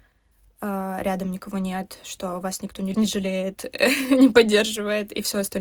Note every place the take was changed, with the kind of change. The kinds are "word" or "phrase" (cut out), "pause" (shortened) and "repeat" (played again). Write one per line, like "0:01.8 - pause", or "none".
0:02.9 - word

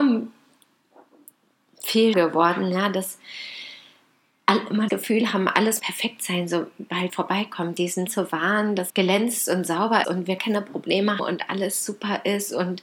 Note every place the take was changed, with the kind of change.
0:02.1 - word
0:04.9 - word
0:05.8 - word
0:07.1 - word
0:08.1 - word
0:08.9 - word
0:10.0 - word
0:10.4 - word
0:11.2 - word

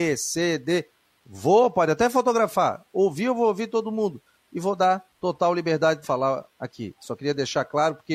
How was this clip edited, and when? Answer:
0:05.1 - pause
0:06.0 - phrase

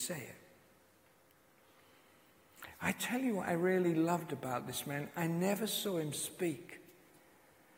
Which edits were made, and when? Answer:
none

